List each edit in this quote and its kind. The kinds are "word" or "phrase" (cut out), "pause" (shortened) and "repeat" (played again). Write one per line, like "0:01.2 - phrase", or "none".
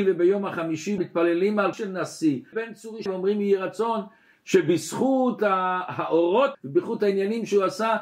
0:01.0 - word
0:01.7 - word
0:02.5 - word
0:03.1 - word
0:06.5 - word